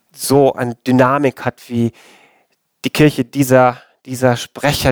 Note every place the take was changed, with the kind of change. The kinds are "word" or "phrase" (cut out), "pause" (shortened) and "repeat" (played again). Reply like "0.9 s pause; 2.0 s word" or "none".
none